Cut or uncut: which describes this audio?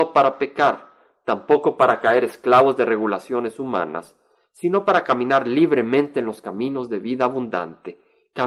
uncut